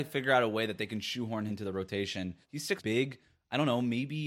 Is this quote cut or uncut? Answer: cut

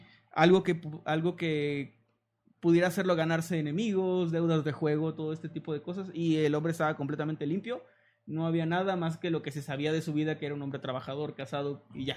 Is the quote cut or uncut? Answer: uncut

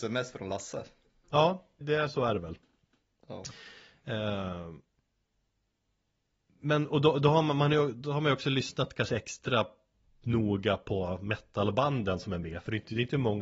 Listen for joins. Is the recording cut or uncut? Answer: cut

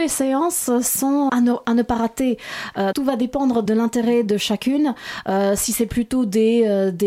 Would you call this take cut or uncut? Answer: cut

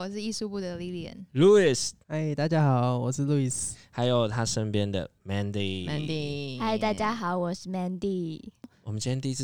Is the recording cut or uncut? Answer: cut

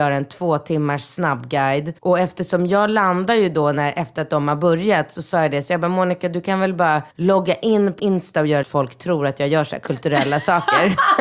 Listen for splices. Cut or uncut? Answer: cut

